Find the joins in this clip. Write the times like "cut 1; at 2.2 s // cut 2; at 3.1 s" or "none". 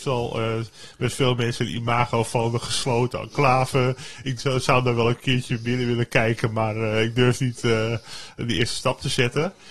none